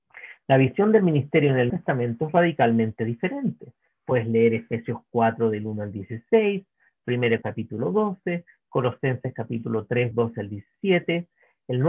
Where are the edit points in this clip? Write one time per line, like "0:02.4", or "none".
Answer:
0:01.7
0:07.4
0:10.1